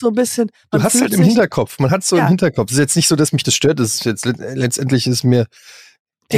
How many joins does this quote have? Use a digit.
0